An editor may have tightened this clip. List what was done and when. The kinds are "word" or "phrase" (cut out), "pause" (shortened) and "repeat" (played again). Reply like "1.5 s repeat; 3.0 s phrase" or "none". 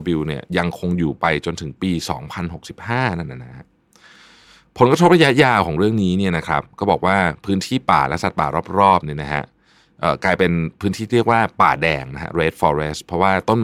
none